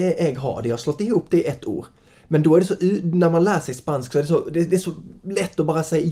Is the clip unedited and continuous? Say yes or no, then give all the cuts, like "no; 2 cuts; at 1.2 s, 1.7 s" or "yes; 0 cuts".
yes; 0 cuts